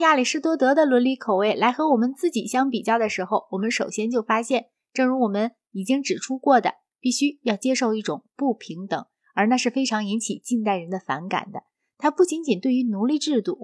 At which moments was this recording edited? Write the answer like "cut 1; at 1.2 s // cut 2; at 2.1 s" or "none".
none